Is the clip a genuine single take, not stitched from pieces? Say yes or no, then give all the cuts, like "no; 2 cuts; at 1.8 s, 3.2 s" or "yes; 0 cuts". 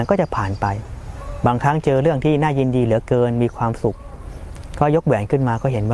yes; 0 cuts